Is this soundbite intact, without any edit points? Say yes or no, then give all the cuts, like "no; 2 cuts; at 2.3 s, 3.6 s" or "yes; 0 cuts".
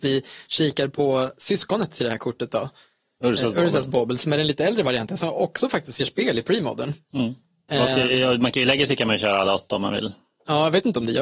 yes; 0 cuts